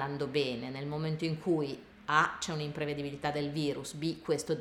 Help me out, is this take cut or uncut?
uncut